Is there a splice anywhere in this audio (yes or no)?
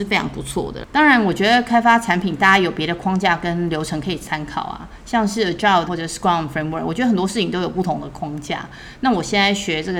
yes